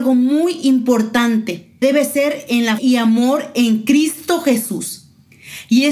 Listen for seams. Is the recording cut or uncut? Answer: cut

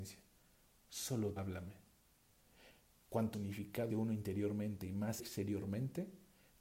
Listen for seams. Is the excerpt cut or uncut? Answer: cut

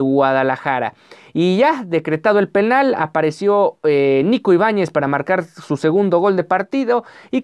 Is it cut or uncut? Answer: uncut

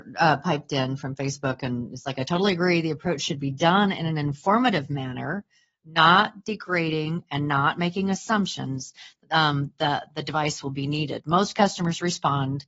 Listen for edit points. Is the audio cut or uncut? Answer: uncut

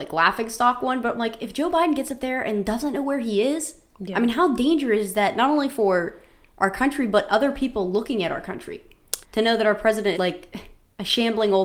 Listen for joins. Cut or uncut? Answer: cut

